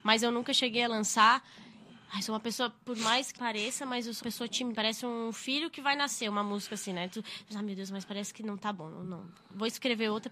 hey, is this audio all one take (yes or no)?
no